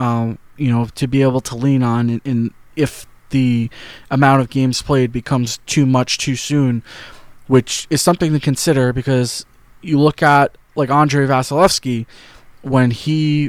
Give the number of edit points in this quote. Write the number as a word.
zero